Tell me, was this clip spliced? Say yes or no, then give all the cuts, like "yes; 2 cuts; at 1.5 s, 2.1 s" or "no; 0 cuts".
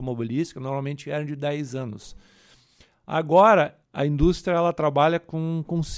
yes; 1 cut; at 3.8 s